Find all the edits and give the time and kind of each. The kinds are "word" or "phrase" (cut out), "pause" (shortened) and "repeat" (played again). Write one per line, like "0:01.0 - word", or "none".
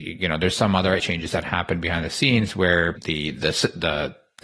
0:01.0 - word
0:03.0 - word